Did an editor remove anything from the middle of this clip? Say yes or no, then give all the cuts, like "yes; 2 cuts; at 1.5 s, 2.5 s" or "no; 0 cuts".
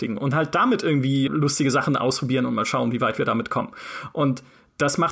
yes; 1 cut; at 1.3 s